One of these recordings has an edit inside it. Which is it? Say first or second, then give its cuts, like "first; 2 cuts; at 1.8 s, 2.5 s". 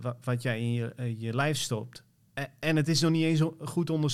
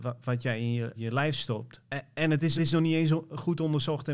second; 3 cuts; at 0.9 s, 1.8 s, 2.6 s